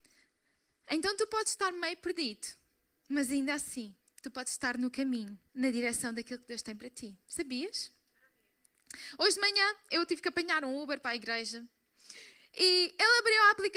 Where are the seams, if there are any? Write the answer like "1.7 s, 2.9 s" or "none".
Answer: 4.0 s, 5.5 s, 11.0 s